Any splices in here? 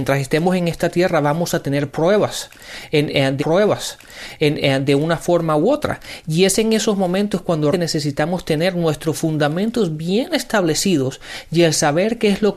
yes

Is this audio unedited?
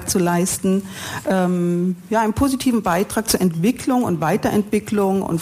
yes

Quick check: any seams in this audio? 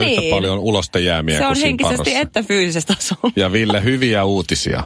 yes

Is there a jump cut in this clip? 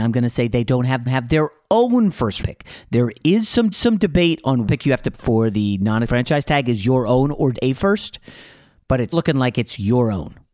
yes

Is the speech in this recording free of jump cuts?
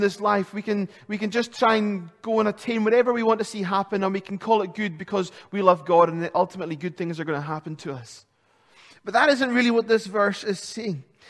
yes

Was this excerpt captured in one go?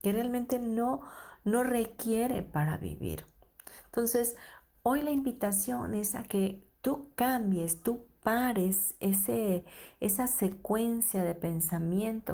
no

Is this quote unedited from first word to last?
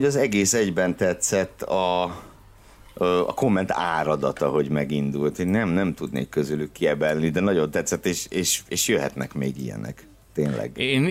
yes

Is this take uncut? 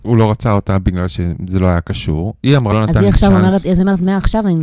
no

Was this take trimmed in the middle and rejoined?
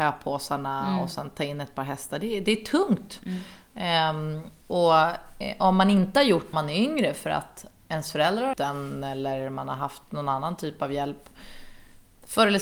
yes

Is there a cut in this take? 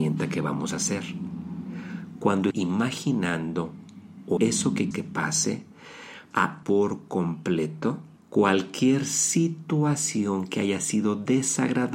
yes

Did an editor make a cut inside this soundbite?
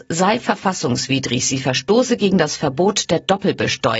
no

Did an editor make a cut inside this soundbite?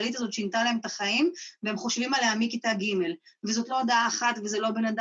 no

